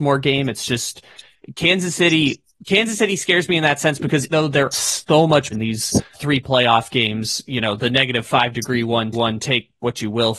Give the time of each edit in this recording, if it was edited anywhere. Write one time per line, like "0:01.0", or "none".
0:04.3
0:04.7
0:05.5
0:06.1
0:09.1

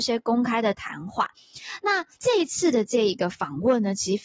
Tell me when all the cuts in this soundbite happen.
0:02.1

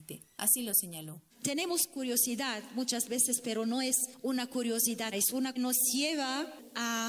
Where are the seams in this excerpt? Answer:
0:01.3
0:05.1
0:05.6

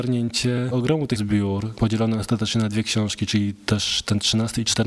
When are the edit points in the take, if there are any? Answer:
0:01.2

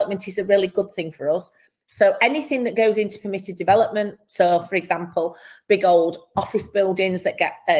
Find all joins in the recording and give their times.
none

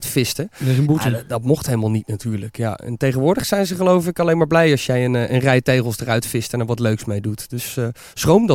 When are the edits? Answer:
none

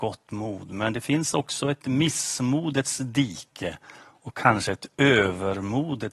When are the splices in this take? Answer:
none

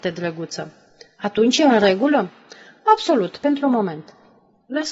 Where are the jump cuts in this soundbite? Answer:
none

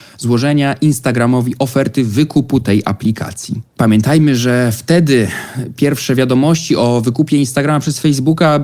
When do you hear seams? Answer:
0:03.7

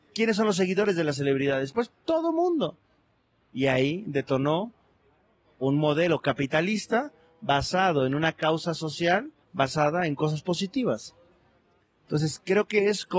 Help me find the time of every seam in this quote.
0:09.4

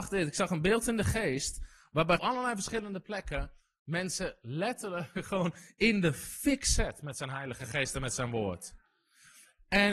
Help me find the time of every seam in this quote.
0:02.2

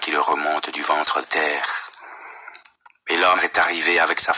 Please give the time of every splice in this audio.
0:01.2
0:03.4

